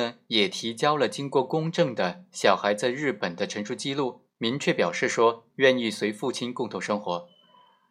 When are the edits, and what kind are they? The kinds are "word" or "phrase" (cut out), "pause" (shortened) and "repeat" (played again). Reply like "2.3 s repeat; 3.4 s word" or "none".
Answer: 4.3 s pause